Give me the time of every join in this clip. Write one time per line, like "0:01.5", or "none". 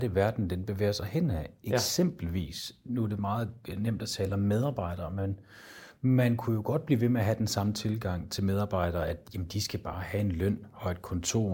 none